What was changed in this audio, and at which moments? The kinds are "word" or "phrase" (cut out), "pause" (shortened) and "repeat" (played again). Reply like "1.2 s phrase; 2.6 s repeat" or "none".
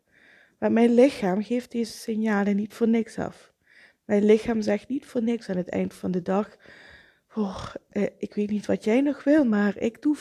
none